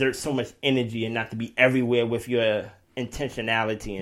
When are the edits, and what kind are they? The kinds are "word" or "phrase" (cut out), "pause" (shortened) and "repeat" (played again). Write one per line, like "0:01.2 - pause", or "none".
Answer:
none